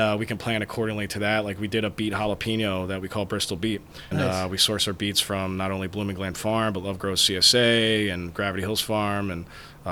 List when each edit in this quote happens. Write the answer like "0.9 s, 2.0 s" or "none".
4.1 s